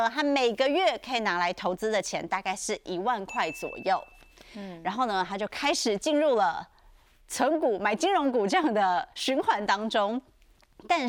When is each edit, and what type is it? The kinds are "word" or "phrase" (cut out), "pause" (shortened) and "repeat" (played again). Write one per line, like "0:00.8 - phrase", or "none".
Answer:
none